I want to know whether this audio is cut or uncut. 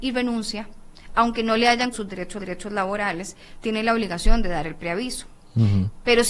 cut